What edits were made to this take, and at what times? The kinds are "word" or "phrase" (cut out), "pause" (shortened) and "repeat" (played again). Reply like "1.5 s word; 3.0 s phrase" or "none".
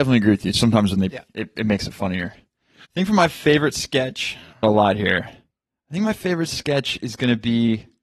1.1 s word; 2.8 s pause; 4.6 s phrase